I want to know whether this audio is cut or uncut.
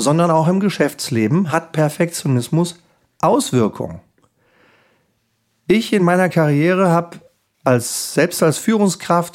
uncut